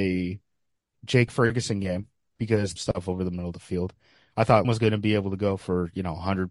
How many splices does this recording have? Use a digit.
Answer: 3